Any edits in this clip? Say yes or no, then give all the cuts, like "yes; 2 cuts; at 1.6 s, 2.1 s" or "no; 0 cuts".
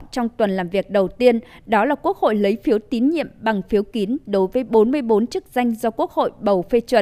no; 0 cuts